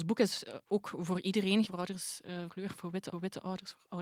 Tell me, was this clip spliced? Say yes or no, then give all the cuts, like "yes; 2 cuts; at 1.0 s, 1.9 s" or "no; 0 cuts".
yes; 3 cuts; at 1.7 s, 2.5 s, 3.1 s